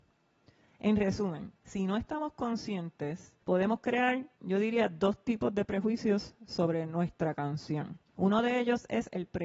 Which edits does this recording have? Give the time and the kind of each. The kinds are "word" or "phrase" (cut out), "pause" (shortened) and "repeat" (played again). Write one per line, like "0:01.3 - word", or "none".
0:01.5 - pause
0:03.4 - pause
0:04.4 - pause
0:08.1 - pause